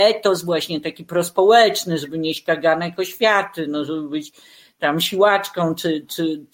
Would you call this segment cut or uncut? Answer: uncut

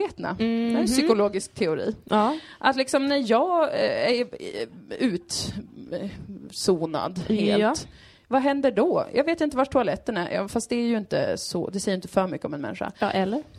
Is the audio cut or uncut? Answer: uncut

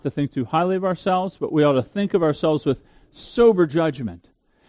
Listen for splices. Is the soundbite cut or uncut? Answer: uncut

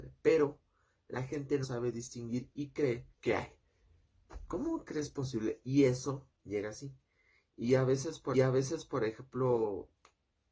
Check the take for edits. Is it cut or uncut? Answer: cut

